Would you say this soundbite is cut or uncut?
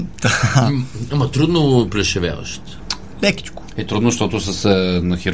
uncut